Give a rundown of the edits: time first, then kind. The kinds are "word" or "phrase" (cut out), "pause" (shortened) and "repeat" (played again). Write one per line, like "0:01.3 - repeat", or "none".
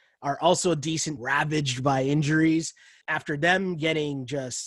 0:01.2 - word
0:03.0 - word